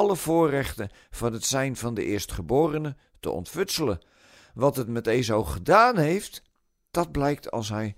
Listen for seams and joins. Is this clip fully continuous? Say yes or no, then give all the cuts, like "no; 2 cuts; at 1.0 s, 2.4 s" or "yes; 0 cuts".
yes; 0 cuts